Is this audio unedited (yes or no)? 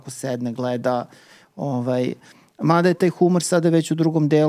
yes